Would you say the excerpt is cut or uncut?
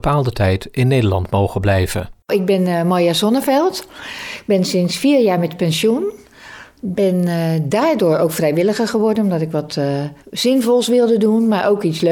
uncut